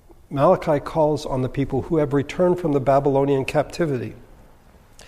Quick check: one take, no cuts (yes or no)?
yes